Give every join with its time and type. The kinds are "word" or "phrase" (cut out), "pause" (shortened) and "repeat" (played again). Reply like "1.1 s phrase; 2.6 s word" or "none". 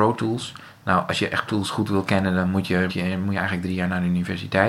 1.5 s word; 2.9 s word